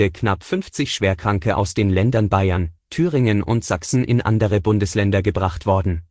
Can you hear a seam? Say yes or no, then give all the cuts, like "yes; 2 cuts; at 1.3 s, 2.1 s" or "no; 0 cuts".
no; 0 cuts